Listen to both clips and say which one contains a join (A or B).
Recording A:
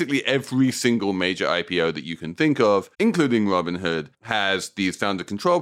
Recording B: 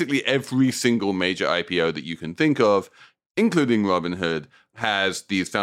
A